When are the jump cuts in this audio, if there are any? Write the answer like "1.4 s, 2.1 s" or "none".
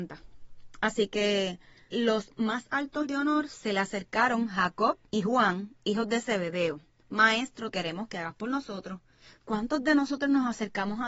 1.9 s, 3.0 s, 5.1 s, 7.7 s